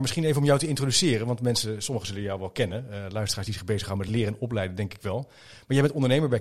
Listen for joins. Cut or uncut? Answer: uncut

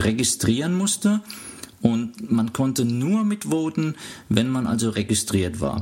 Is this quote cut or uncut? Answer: uncut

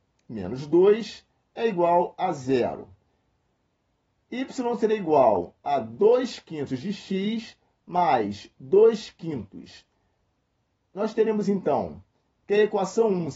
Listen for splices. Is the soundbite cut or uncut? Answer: uncut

